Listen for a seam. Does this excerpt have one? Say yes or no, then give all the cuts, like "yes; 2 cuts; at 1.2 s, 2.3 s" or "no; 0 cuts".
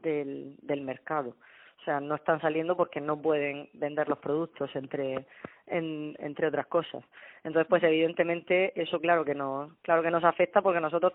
no; 0 cuts